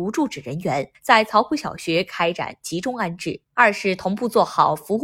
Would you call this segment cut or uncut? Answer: cut